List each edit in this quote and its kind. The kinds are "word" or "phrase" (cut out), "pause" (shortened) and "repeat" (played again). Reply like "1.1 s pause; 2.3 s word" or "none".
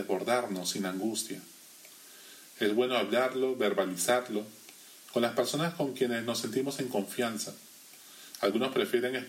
none